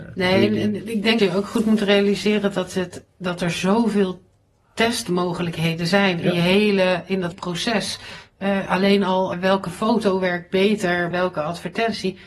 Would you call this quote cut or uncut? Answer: cut